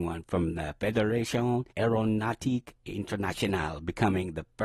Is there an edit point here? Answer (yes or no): yes